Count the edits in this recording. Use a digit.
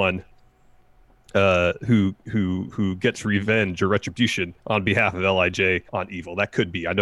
3